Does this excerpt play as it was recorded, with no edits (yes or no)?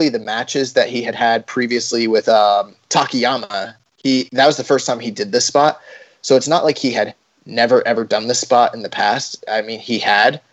yes